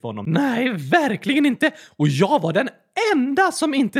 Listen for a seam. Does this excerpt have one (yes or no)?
no